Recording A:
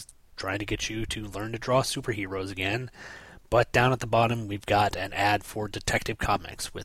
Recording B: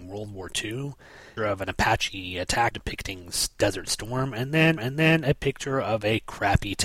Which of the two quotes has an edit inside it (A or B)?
B